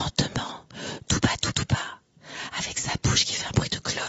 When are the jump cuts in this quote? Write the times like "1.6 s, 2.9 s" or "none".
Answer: 1.5 s